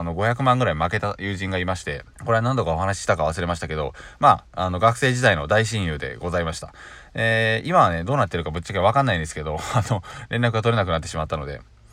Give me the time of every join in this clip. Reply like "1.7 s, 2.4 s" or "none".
2.1 s